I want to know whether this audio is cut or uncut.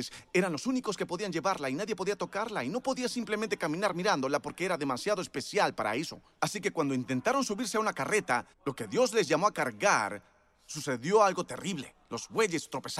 cut